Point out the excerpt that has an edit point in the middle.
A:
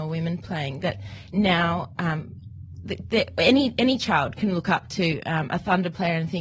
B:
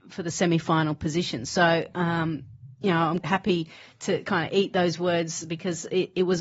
B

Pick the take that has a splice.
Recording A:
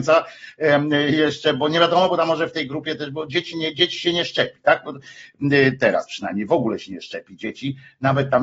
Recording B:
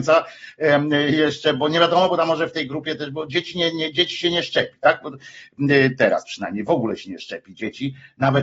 A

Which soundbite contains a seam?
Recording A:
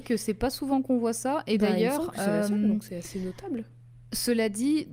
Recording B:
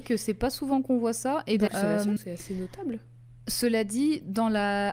B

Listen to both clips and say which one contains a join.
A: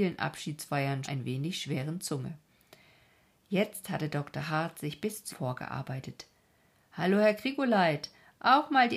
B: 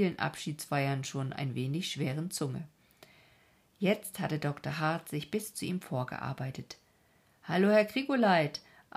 A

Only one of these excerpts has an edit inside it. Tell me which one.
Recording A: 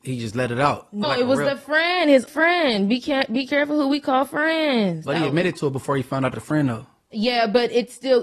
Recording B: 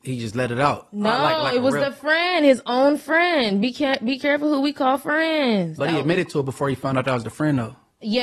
A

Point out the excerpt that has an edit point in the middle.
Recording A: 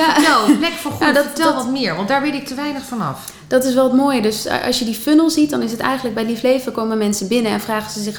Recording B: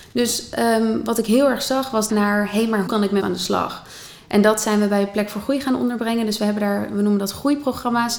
B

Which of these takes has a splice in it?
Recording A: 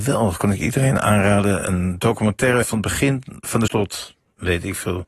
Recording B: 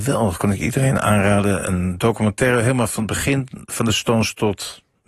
A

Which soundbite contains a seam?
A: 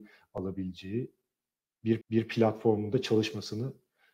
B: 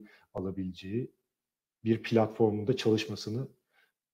A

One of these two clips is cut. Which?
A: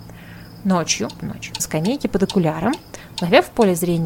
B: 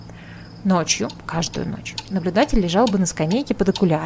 A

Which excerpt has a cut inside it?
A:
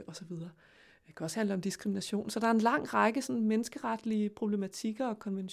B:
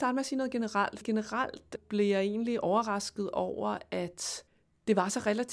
B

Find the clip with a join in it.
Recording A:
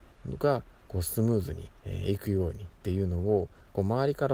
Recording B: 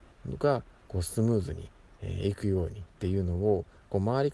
A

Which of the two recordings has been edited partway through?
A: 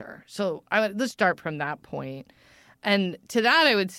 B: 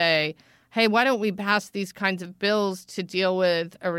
A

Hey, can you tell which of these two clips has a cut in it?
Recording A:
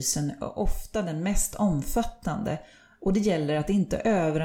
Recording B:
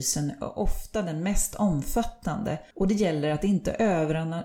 B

